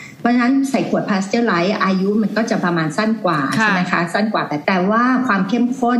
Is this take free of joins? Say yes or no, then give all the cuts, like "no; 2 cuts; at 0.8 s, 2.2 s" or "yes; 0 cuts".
no; 1 cut; at 4.6 s